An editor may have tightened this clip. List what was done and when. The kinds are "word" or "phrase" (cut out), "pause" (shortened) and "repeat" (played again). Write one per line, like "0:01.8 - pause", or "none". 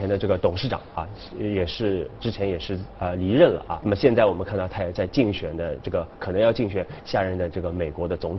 0:03.8 - word